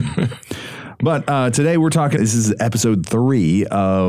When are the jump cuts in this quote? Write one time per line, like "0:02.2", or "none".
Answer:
0:02.2